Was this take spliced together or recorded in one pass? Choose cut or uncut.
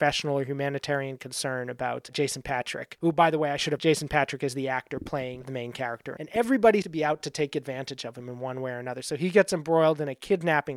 cut